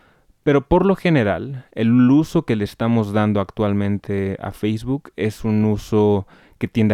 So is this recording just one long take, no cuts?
yes; 0 cuts

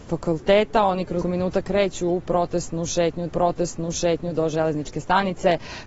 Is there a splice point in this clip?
yes; 2 cuts; at 1.2 s, 3.3 s

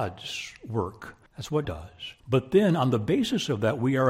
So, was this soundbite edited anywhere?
yes; 3 cuts; at 1.3 s, 1.6 s, 2.2 s

